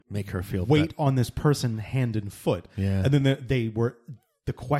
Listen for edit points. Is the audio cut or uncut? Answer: uncut